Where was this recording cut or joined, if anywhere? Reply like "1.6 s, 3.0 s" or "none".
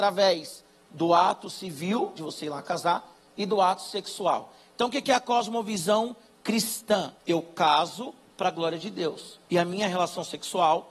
2.2 s, 7.2 s, 9.4 s